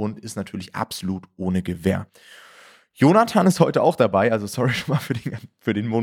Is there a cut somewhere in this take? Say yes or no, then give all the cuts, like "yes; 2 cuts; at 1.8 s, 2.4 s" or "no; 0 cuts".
no; 0 cuts